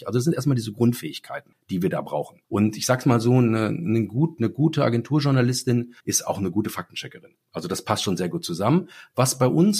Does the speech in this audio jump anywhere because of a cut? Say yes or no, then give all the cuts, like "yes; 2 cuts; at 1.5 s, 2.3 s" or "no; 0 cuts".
yes; 2 cuts; at 2.4 s, 6.0 s